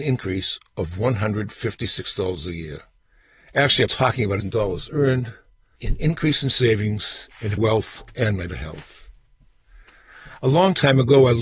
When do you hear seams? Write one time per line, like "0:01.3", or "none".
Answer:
0:03.9
0:04.4
0:05.8
0:07.6
0:08.5